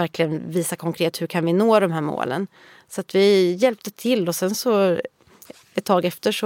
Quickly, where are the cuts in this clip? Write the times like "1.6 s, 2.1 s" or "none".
none